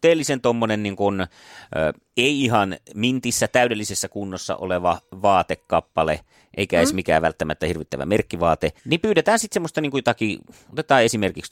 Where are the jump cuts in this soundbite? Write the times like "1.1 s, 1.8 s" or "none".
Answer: 8.8 s